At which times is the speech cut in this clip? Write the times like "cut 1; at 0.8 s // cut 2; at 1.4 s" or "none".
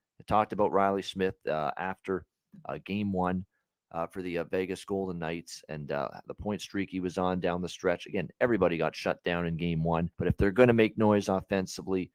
cut 1; at 10.1 s